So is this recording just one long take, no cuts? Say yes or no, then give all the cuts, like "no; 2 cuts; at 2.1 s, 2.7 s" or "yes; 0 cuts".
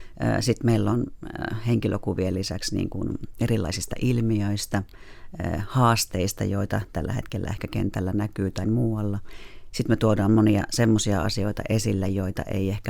no; 1 cut; at 8.6 s